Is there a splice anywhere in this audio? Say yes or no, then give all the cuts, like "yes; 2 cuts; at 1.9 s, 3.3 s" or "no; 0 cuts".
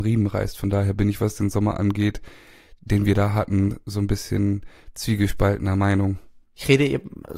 no; 0 cuts